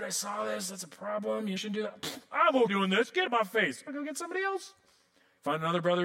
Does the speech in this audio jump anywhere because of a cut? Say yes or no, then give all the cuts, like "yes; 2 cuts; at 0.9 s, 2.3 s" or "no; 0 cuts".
yes; 4 cuts; at 1.6 s, 2.7 s, 3.3 s, 3.9 s